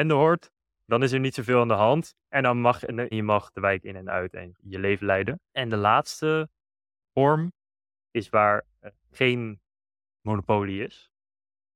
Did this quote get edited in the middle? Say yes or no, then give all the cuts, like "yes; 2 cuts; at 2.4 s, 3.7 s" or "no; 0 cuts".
yes; 4 cuts; at 2.2 s, 3.1 s, 4.6 s, 5.5 s